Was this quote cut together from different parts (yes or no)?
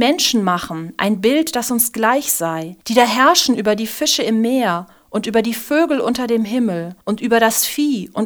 yes